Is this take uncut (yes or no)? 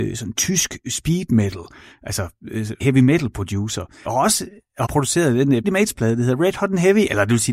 no